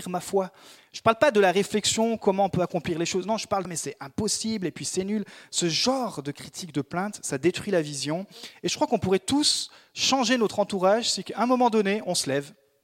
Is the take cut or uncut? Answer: cut